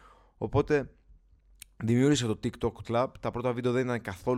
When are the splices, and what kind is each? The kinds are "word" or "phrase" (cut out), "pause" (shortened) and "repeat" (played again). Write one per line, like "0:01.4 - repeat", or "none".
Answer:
0:02.8 - phrase